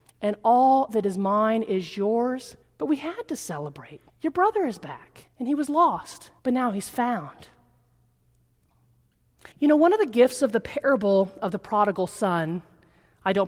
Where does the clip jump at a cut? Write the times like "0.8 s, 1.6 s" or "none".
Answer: 2.6 s, 4.1 s, 5.3 s, 6.4 s, 9.5 s